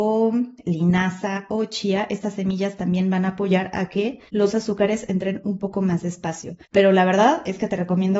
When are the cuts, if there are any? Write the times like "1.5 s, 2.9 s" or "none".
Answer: 4.3 s, 6.6 s